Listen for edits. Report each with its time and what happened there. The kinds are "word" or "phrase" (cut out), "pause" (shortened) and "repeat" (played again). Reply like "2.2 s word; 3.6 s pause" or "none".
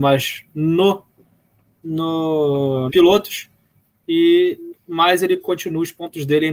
2.9 s phrase